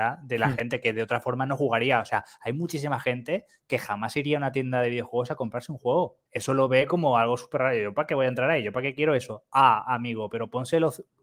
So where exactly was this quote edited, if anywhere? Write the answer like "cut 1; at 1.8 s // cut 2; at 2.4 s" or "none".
cut 1; at 6.3 s